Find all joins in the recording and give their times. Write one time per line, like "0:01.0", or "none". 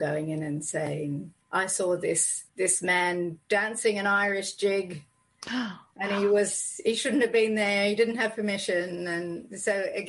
0:01.4
0:02.5
0:03.4